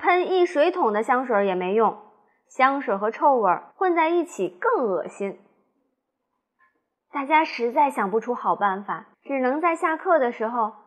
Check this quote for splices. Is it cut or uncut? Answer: cut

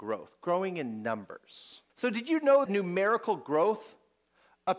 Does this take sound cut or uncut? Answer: cut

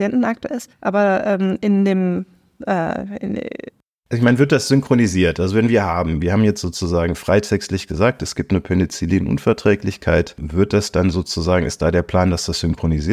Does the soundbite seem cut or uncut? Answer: uncut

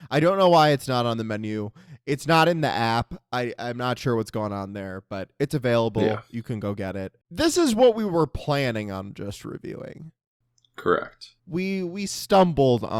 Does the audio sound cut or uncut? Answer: cut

